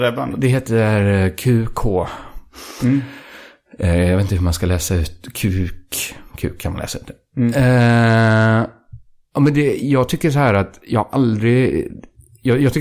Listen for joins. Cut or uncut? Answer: uncut